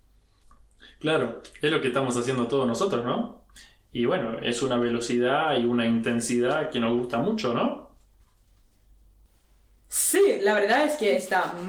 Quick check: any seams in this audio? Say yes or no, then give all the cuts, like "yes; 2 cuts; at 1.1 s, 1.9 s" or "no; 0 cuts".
no; 0 cuts